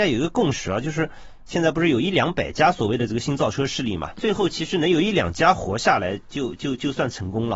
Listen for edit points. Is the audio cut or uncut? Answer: cut